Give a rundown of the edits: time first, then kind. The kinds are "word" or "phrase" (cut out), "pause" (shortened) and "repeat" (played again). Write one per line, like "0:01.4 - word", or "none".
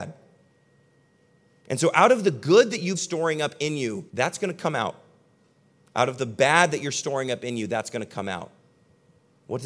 0:02.9 - word
0:04.1 - pause

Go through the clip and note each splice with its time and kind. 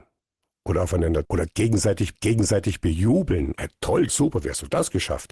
0:01.2 - word
0:02.1 - repeat
0:03.6 - word
0:04.1 - word

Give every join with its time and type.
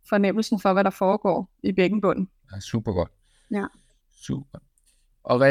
0:02.4 - pause

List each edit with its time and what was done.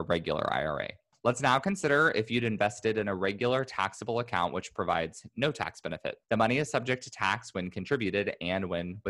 0:01.1 - pause
0:06.2 - pause

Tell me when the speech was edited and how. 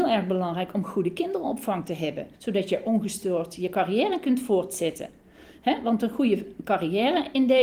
0:02.3 - pause

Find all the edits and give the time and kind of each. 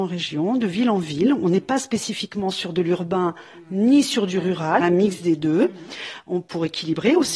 0:04.8 - phrase

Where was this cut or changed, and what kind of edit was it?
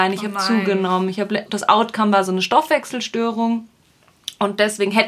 0:01.4 - word

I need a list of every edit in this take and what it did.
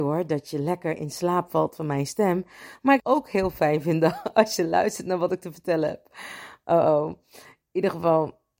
0:03.0 - phrase

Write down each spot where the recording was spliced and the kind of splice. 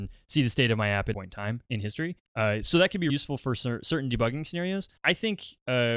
0:01.1 - phrase
0:02.3 - pause
0:03.1 - word
0:05.0 - word

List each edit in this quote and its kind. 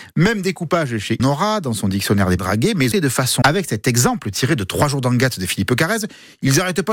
0:01.2 - word
0:02.4 - phrase
0:02.9 - phrase
0:03.4 - word

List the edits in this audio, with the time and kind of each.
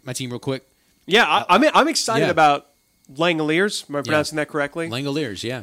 none

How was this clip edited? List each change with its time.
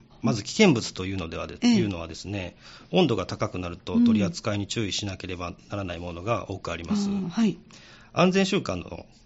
0:02.8 - pause

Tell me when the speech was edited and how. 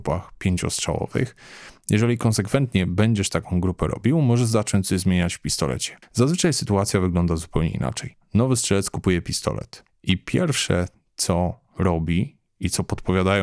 none

